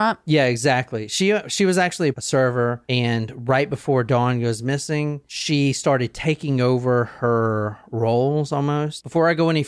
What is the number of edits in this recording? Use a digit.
1